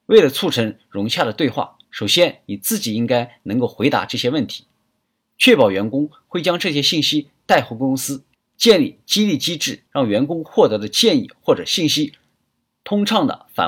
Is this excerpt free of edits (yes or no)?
no